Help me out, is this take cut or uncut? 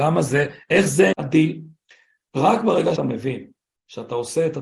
cut